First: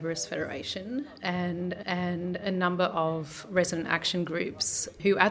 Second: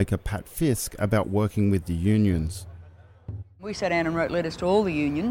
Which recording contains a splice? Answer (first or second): first